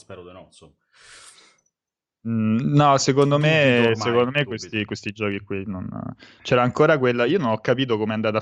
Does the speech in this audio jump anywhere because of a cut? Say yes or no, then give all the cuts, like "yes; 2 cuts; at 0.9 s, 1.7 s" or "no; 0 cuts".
no; 0 cuts